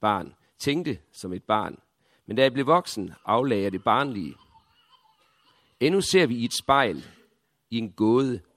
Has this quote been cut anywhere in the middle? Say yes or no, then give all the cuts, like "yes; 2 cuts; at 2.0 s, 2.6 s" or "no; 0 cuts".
no; 0 cuts